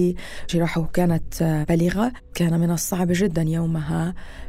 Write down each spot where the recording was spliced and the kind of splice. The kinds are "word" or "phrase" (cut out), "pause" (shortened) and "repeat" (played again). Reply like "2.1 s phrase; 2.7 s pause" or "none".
none